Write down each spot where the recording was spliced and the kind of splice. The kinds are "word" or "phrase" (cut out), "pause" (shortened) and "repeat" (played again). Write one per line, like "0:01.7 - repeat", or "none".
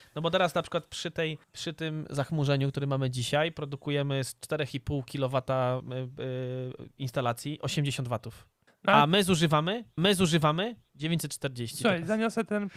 0:01.4 - pause
0:08.7 - pause
0:10.0 - repeat